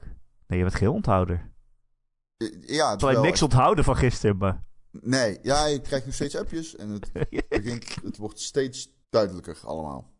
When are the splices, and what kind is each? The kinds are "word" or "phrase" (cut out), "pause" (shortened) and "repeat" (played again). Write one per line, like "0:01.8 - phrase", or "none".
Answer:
0:03.0 - phrase
0:09.0 - pause